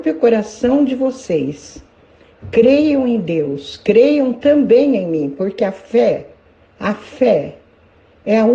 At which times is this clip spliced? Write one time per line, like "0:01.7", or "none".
0:06.5

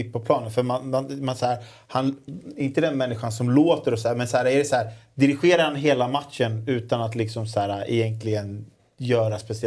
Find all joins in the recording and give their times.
none

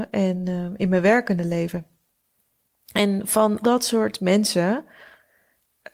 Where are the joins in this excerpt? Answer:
0:03.6

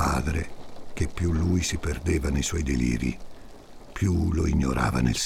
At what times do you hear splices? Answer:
none

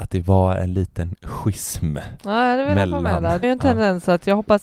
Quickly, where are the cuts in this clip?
0:03.4

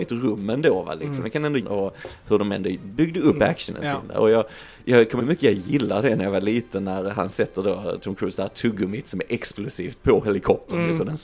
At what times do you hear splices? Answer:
0:01.6
0:05.2

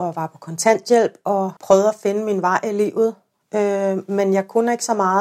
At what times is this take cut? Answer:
0:01.6

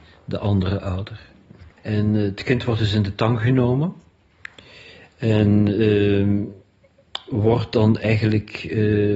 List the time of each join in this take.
0:01.7

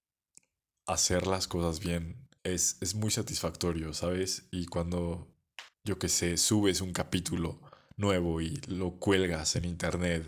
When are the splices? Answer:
0:02.4
0:05.7

